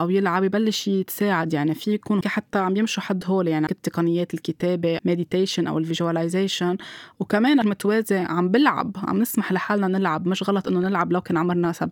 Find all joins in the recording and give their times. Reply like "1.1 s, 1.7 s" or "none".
2.2 s, 3.7 s, 5.0 s, 7.6 s